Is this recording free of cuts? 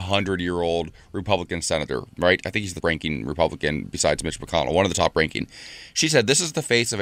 no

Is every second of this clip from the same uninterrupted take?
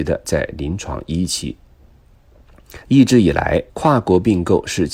no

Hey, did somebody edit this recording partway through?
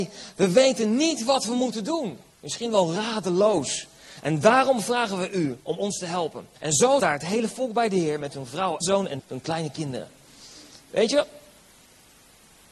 yes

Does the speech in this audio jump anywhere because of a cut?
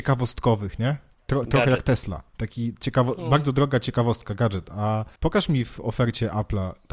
yes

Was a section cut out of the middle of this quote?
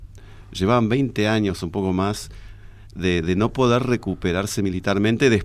no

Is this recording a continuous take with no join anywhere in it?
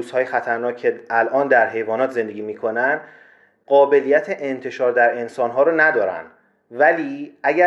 yes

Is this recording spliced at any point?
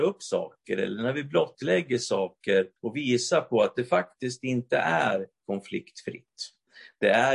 yes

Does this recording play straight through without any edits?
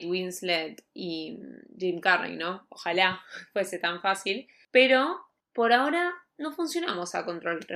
yes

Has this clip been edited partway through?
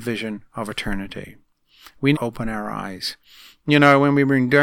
yes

